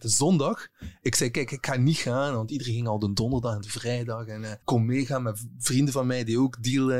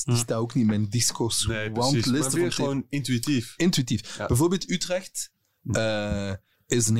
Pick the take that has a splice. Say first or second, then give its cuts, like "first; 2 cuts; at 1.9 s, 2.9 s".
first; 1 cut; at 4.6 s